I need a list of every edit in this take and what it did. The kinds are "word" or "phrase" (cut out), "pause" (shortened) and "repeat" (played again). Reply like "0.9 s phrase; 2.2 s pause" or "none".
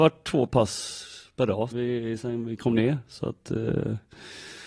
1.7 s word